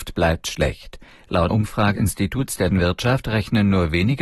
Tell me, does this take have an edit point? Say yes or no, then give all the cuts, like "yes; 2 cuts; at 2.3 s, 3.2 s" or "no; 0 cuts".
yes; 3 cuts; at 1.5 s, 2.0 s, 2.7 s